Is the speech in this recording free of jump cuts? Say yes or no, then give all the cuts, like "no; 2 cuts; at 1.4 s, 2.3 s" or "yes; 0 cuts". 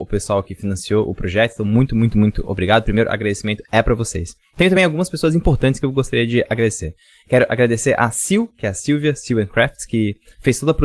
yes; 0 cuts